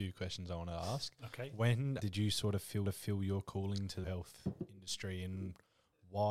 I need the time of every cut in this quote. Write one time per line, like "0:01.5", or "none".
0:02.0
0:02.8
0:04.0